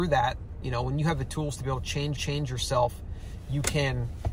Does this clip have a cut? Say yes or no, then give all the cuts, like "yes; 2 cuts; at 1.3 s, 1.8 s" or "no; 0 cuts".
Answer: yes; 1 cut; at 2.2 s